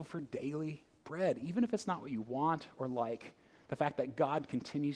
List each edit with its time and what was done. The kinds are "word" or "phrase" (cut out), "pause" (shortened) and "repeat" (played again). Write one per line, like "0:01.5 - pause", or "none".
none